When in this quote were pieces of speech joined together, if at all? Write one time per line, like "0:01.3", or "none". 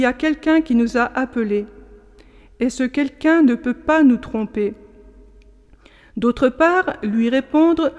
none